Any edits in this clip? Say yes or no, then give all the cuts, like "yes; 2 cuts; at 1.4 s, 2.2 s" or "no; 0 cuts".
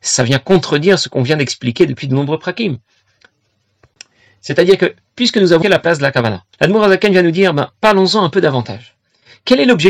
yes; 2 cuts; at 5.6 s, 6.5 s